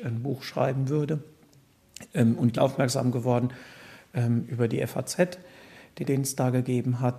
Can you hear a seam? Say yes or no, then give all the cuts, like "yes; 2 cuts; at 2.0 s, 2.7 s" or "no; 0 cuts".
yes; 2 cuts; at 2.6 s, 6.0 s